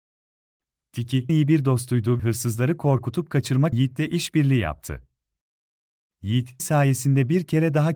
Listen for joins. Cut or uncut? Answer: cut